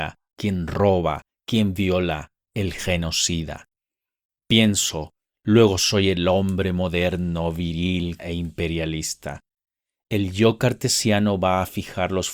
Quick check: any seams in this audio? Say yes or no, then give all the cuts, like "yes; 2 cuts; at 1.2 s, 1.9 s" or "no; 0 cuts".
yes; 1 cut; at 8.2 s